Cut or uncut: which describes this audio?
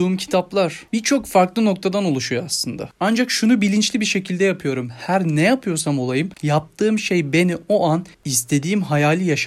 cut